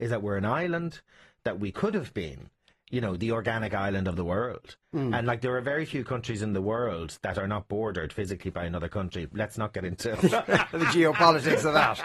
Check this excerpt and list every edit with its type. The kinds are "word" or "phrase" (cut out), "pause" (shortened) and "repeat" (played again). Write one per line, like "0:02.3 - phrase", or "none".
0:01.7 - word
0:04.8 - pause